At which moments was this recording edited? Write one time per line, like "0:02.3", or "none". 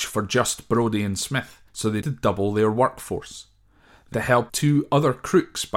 0:01.7
0:02.0
0:04.1
0:04.5